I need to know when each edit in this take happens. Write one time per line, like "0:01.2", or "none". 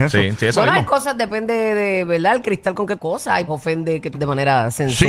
0:03.0
0:03.5
0:04.1